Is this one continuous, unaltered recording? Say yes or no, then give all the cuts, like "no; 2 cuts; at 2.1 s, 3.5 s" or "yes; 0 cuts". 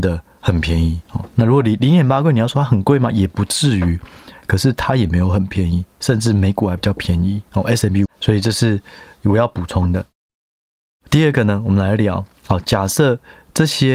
no; 3 cuts; at 1.1 s, 7.5 s, 8.1 s